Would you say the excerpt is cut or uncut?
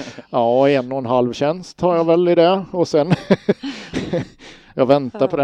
uncut